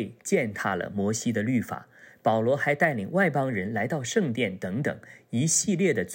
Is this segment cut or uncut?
uncut